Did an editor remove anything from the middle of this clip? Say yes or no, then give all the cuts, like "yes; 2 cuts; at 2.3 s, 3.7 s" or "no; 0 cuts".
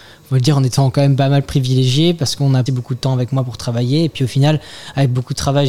yes; 1 cut; at 2.7 s